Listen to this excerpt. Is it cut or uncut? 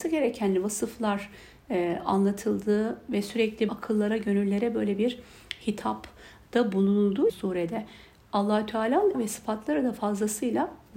cut